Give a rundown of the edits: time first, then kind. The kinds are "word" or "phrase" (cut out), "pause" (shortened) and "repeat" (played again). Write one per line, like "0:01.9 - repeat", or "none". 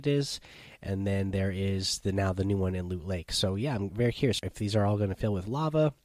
0:04.4 - word

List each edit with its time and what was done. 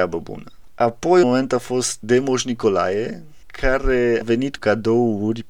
0:01.2 - word
0:02.0 - word
0:04.2 - word
0:04.6 - word

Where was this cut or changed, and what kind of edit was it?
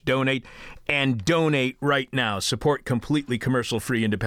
none

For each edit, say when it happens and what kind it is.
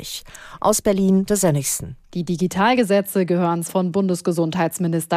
0:01.3 - word
0:02.0 - pause
0:03.7 - phrase

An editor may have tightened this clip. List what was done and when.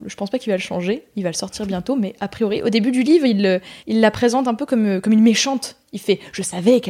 0:03.8 - pause

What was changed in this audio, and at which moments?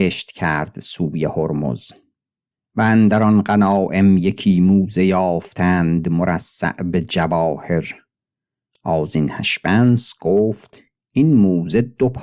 none

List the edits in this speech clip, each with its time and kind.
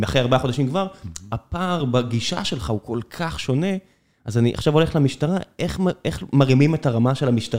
none

